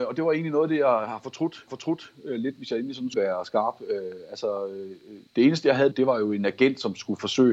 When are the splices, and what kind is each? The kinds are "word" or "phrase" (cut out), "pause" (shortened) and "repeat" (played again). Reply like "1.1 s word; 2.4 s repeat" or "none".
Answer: 1.7 s repeat; 3.1 s word; 5.3 s pause; 5.9 s phrase